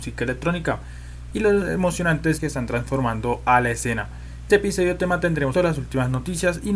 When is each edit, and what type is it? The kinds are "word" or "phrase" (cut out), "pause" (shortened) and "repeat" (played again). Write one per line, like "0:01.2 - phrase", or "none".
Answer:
0:02.4 - phrase
0:04.5 - word
0:05.5 - phrase